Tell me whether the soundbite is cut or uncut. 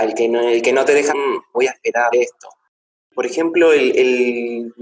cut